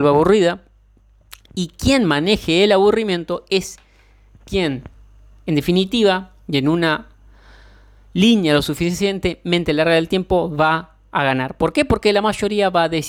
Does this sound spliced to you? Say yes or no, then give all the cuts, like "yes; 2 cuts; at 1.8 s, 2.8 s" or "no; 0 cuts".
no; 0 cuts